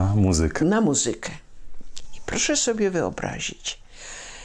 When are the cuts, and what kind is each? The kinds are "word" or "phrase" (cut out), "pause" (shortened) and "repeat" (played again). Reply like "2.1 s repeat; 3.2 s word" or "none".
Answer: none